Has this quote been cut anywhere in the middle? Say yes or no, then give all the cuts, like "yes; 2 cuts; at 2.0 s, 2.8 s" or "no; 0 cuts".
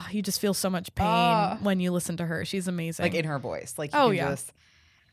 no; 0 cuts